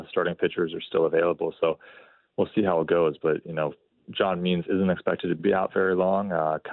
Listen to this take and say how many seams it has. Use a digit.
1